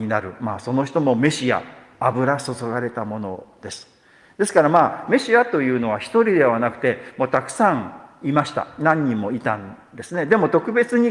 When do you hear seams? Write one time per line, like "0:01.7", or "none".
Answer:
none